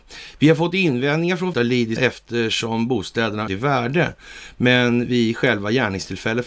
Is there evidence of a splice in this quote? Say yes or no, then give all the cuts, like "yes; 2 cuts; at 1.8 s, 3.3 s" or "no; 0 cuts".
yes; 3 cuts; at 1.5 s, 2.0 s, 3.5 s